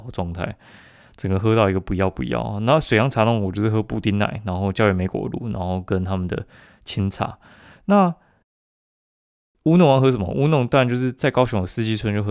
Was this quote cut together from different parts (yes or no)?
no